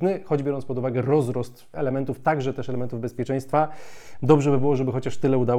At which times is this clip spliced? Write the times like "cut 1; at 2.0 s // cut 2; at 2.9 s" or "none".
cut 1; at 1.7 s